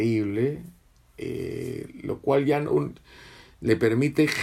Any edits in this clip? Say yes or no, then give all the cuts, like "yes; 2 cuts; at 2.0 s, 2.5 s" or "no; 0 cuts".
no; 0 cuts